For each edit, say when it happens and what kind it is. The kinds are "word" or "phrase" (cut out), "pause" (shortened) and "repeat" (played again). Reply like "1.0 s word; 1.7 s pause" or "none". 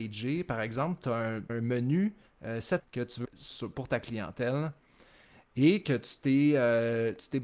1.5 s word; 2.8 s word; 3.2 s word; 3.7 s word